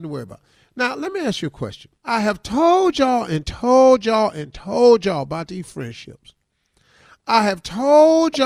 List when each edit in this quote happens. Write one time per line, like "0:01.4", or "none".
0:02.0